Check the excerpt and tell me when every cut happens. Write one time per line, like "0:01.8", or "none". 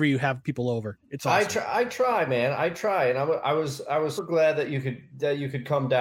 0:04.2